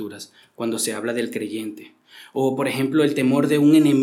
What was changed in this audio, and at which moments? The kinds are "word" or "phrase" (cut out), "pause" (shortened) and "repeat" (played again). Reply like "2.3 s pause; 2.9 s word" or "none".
none